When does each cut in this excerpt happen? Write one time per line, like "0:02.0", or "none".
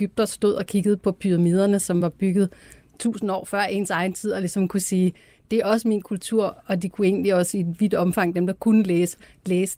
none